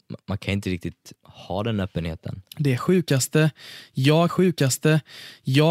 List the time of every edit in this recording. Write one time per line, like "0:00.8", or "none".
0:01.2
0:04.3